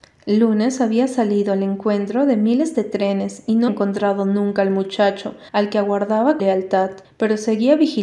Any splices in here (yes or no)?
yes